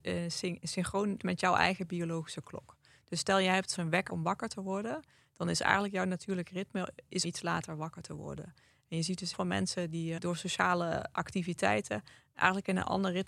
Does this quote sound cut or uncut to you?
cut